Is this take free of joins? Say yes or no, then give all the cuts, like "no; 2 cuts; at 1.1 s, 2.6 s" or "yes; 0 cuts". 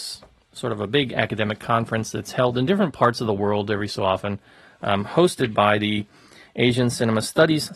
yes; 0 cuts